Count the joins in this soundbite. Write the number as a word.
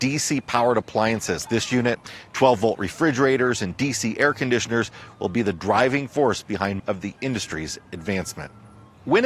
two